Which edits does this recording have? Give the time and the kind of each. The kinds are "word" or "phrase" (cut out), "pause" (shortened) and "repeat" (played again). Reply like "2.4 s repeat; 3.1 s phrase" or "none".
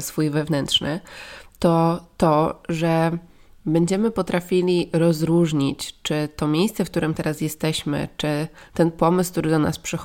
none